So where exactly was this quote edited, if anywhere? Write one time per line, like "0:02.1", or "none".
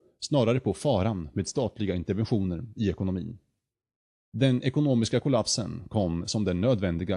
none